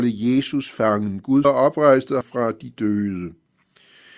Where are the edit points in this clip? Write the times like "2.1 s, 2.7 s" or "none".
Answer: 1.4 s, 2.2 s